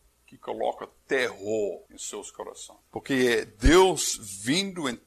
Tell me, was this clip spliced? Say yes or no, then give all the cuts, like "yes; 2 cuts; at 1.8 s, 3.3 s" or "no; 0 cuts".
yes; 2 cuts; at 1.9 s, 2.9 s